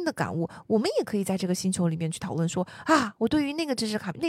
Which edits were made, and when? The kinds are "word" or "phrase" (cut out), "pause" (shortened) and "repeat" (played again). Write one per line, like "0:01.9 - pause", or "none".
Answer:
none